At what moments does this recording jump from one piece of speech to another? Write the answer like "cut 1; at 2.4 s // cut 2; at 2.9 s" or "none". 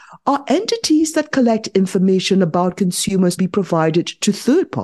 cut 1; at 3.4 s